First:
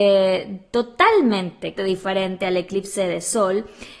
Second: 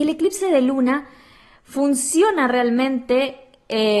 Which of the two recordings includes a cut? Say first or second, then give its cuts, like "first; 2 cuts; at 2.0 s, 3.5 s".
first; 1 cut; at 1.8 s